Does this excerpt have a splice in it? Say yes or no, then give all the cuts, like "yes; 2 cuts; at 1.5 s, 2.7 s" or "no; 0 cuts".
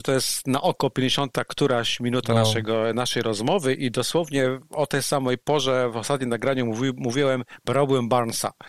no; 0 cuts